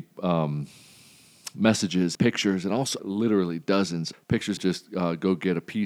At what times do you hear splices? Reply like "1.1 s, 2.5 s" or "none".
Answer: 2.1 s, 3.0 s, 4.1 s, 4.6 s